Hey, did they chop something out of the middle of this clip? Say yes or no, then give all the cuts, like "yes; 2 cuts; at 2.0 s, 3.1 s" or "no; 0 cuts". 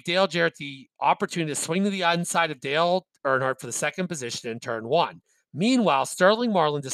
no; 0 cuts